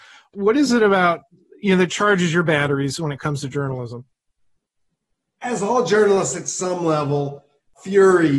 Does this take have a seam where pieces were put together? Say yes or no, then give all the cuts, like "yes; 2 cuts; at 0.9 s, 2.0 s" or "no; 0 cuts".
no; 0 cuts